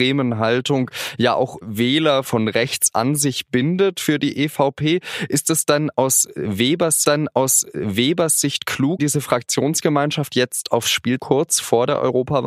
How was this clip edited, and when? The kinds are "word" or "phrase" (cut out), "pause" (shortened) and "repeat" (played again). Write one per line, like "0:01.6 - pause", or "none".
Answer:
0:07.0 - repeat
0:09.0 - word
0:11.2 - phrase